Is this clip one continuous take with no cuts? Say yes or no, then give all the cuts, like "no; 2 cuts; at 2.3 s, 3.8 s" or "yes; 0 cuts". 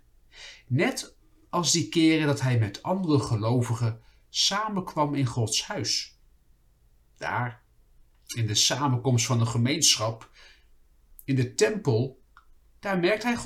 yes; 0 cuts